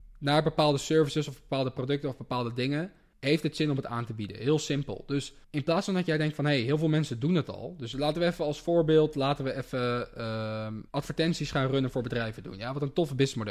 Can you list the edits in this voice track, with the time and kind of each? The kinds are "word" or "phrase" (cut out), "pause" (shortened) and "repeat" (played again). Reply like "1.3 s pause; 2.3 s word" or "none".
3.1 s pause; 5.4 s pause; 10.9 s pause